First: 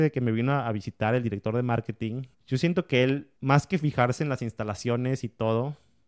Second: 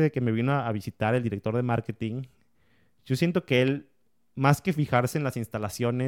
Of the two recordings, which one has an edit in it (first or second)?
first